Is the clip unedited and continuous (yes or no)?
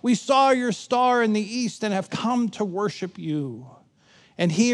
yes